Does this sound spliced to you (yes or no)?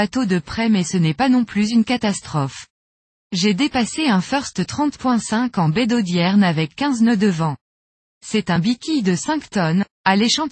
no